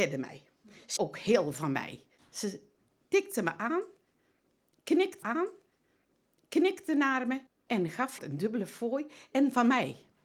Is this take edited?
yes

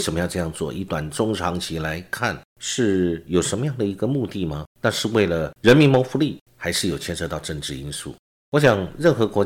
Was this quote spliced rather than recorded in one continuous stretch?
yes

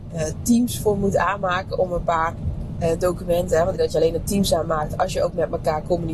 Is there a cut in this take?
yes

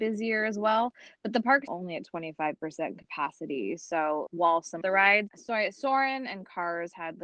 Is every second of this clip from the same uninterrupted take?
no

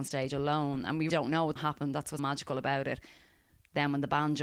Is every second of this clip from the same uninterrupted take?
no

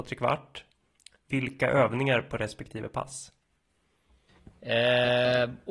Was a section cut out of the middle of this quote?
no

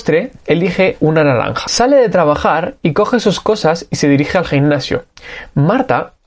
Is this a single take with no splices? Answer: yes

